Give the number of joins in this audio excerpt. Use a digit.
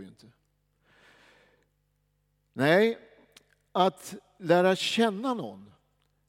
0